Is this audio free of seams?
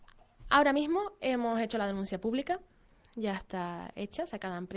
yes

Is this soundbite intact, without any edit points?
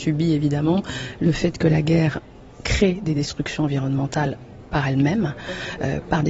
yes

